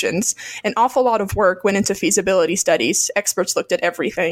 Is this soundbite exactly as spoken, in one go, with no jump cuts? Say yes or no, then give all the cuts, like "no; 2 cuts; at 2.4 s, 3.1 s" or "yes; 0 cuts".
yes; 0 cuts